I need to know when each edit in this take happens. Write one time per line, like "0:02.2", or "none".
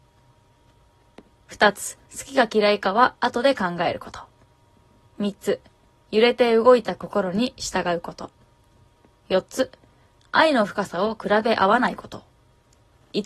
0:02.1